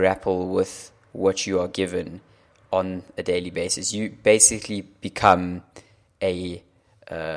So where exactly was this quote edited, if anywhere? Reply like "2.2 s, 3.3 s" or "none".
none